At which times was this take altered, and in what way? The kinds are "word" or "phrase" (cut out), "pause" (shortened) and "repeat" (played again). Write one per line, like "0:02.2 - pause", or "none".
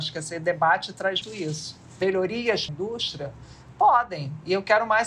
0:01.2 - word
0:02.7 - phrase